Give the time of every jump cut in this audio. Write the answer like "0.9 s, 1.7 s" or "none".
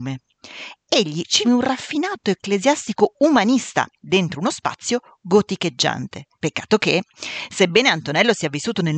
1.4 s, 4.0 s, 6.3 s